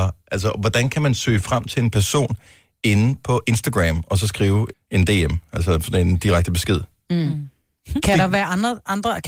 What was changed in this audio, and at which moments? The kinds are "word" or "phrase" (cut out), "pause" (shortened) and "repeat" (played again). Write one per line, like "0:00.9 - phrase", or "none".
0:04.7 - word